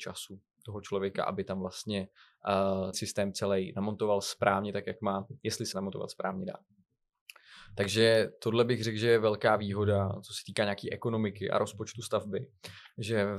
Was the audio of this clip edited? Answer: yes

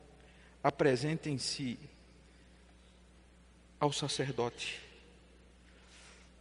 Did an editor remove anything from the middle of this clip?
no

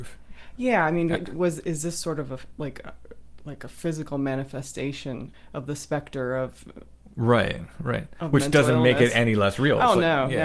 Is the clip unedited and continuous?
yes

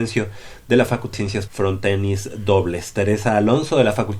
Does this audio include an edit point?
yes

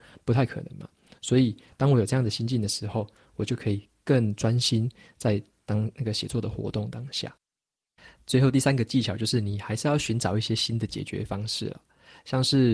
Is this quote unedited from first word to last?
yes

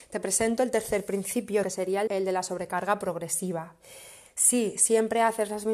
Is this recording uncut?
no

